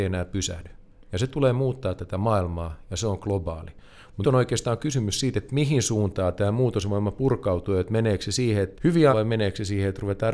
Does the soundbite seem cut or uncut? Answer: cut